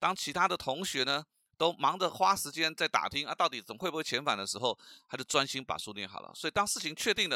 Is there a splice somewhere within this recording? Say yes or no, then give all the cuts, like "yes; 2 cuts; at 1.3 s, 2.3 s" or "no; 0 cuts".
no; 0 cuts